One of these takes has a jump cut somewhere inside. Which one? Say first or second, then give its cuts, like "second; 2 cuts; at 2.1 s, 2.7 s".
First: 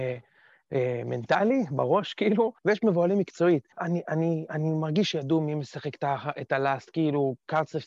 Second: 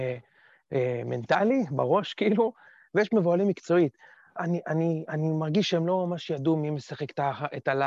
first; 3 cuts; at 2.6 s, 3.7 s, 5.1 s